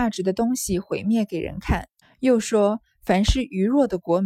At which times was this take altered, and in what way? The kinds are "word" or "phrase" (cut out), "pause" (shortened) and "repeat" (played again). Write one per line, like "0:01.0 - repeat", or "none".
0:02.0 - pause